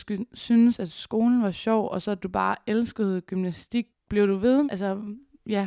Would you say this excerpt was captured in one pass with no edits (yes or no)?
no